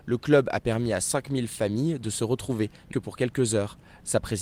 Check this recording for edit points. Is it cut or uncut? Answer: cut